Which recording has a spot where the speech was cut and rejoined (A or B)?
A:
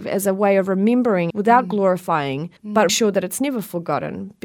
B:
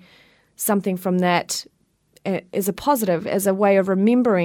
A